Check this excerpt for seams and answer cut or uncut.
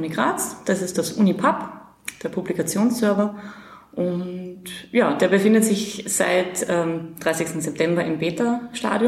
uncut